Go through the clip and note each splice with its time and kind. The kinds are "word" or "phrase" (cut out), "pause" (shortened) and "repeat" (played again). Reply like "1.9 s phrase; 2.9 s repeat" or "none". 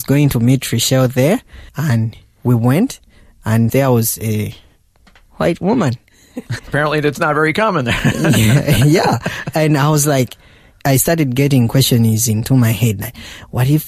1.7 s pause; 3.7 s phrase; 6.6 s word